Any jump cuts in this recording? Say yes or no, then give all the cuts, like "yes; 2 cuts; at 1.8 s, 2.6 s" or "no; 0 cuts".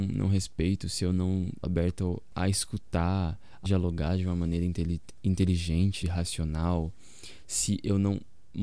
yes; 4 cuts; at 1.6 s, 2.3 s, 3.6 s, 6.0 s